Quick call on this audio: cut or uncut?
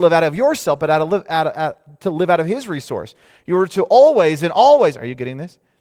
uncut